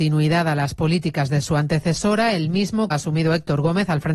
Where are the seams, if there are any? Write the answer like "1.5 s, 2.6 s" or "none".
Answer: 2.9 s